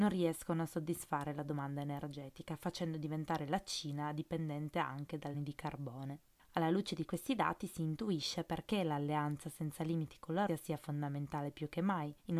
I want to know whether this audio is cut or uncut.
cut